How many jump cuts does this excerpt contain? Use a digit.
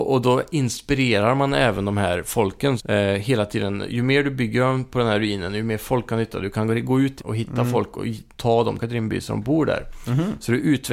3